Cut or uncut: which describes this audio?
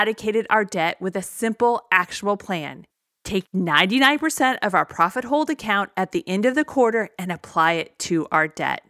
uncut